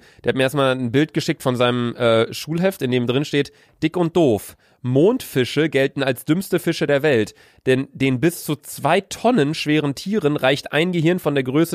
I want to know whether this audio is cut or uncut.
uncut